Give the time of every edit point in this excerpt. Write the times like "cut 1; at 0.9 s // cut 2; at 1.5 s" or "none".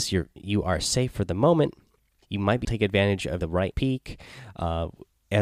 cut 1; at 2.2 s // cut 2; at 2.6 s // cut 3; at 3.4 s // cut 4; at 3.7 s